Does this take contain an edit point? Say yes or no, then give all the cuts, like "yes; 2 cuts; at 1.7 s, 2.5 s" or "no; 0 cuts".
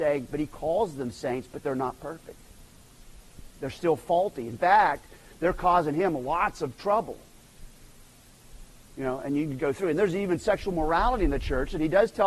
yes; 1 cut; at 9.6 s